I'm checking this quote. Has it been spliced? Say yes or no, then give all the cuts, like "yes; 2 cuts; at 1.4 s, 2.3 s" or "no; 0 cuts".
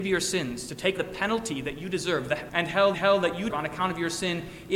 yes; 4 cuts; at 1.0 s, 2.5 s, 2.9 s, 3.5 s